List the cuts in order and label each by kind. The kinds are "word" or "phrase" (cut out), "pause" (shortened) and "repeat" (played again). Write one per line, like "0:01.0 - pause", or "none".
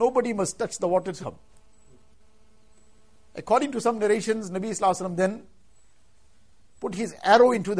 0:01.2 - word